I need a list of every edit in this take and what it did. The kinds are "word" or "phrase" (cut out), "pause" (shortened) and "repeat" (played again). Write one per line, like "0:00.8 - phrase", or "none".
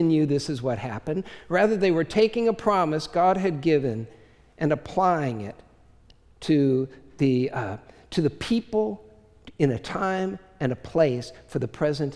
none